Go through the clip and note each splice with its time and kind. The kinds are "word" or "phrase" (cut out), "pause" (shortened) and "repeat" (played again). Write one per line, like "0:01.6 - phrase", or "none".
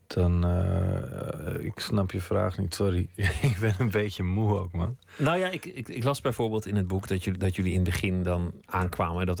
none